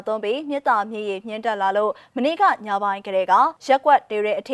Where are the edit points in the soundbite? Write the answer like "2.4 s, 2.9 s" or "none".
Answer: 3.6 s